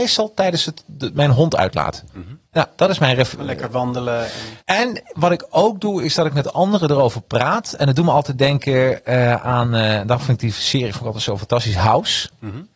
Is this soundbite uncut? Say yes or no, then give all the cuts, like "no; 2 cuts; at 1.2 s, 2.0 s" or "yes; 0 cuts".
no; 2 cuts; at 2.5 s, 4.6 s